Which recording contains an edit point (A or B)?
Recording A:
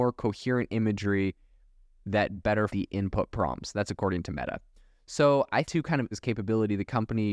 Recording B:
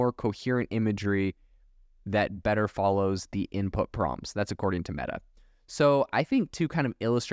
A